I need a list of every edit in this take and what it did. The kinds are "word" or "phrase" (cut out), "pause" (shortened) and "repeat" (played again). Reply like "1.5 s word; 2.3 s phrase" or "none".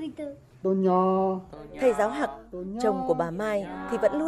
none